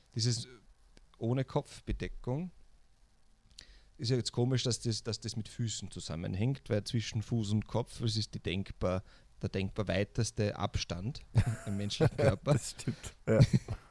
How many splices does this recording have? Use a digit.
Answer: 0